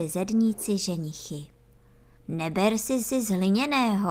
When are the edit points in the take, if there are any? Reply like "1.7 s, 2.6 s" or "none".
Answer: 3.0 s

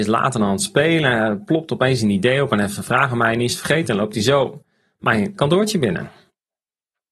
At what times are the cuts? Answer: 5.4 s

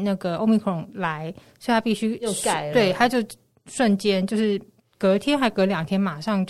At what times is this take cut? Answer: none

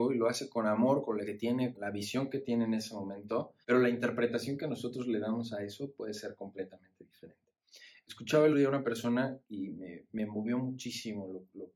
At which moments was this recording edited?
1.2 s, 1.7 s, 3.6 s, 8.5 s, 9.4 s, 10.1 s

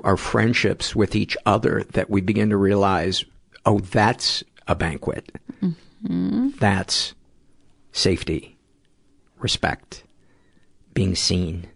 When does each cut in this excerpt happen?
none

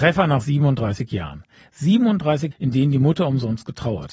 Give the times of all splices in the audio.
2.5 s

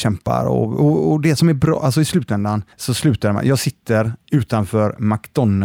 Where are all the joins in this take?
2.7 s

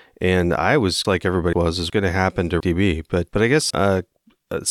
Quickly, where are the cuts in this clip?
1.0 s, 1.5 s, 1.9 s, 2.6 s, 3.3 s, 3.7 s

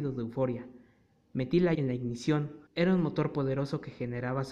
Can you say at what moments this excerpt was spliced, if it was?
1.7 s, 2.7 s

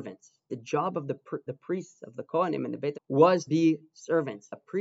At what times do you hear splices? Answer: 1.5 s, 2.9 s, 3.5 s

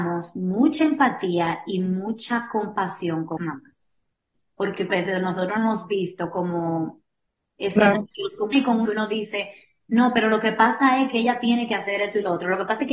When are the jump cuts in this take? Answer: 3.4 s, 4.9 s, 5.6 s, 7.6 s, 8.5 s, 8.9 s

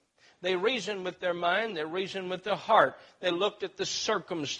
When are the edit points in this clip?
none

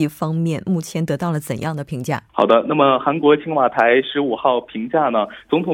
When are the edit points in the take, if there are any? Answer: 2.3 s

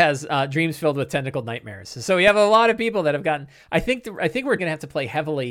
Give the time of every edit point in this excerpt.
4.6 s

